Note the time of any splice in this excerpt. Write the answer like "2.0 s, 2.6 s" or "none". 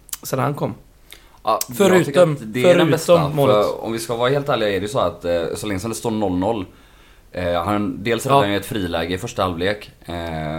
none